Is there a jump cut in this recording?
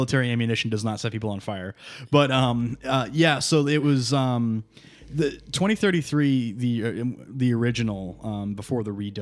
no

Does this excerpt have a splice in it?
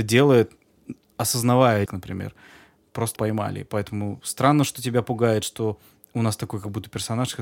yes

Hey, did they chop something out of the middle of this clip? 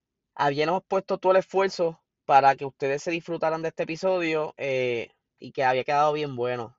no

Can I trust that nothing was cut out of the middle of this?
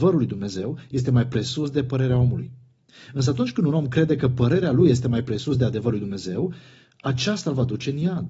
yes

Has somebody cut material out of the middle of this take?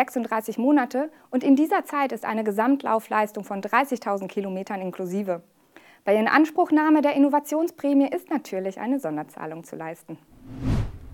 no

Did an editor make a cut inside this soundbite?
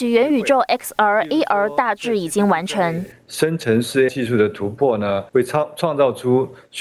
yes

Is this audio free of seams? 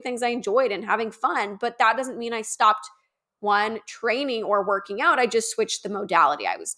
yes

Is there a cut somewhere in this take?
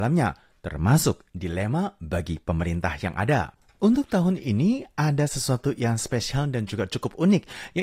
no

